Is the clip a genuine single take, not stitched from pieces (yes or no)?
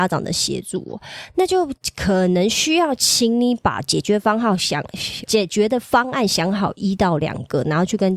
no